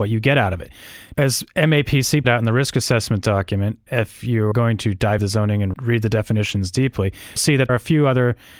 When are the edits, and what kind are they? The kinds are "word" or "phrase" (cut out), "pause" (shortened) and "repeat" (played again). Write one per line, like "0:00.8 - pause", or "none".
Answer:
0:01.1 - word
0:02.2 - word
0:03.9 - word
0:04.5 - word
0:05.2 - word
0:05.7 - word
0:07.4 - word
0:07.7 - word